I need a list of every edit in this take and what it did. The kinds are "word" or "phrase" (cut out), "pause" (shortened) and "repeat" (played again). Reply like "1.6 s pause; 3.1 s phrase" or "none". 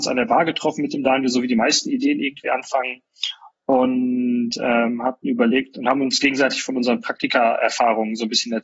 none